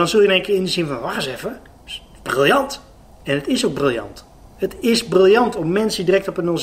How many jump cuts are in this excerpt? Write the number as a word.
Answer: zero